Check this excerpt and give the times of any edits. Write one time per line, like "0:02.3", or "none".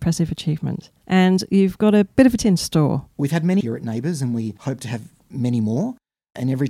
0:02.4
0:03.6